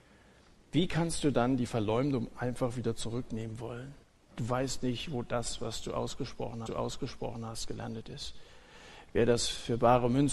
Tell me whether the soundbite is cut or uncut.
cut